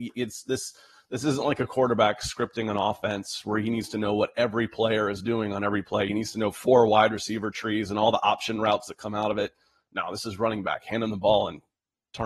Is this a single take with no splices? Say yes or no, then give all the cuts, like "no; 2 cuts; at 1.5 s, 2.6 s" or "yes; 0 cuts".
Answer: yes; 0 cuts